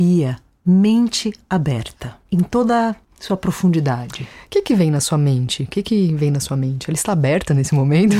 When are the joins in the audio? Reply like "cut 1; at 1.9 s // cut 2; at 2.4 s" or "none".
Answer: cut 1; at 2.2 s